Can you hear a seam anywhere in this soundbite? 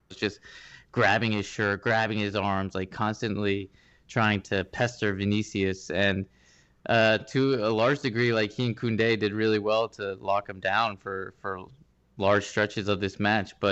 no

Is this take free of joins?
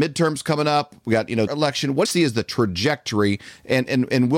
no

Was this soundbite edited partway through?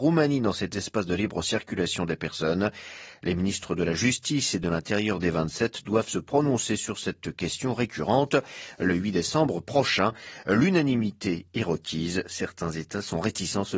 no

